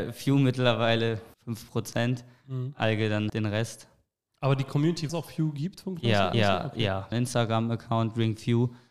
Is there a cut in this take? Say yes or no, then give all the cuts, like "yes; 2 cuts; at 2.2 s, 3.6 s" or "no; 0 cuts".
yes; 5 cuts; at 1.3 s, 3.3 s, 5.1 s, 6.3 s, 7.1 s